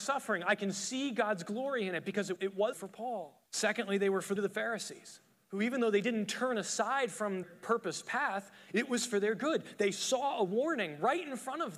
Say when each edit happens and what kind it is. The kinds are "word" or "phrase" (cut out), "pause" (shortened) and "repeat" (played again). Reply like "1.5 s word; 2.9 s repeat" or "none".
2.4 s word; 2.7 s word; 3.5 s pause; 4.4 s word; 5.3 s pause; 7.4 s word